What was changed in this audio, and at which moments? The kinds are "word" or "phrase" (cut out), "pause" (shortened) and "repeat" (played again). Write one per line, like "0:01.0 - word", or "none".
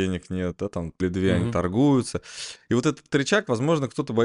0:01.0 - word